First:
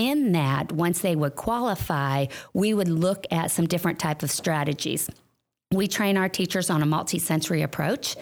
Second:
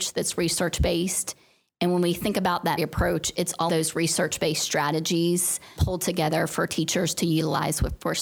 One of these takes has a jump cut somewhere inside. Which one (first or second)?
second